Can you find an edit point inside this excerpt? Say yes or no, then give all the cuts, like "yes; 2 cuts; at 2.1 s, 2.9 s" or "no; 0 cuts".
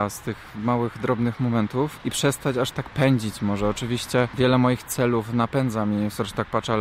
no; 0 cuts